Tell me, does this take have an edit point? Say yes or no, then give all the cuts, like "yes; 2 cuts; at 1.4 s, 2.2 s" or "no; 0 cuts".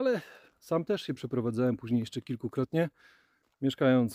no; 0 cuts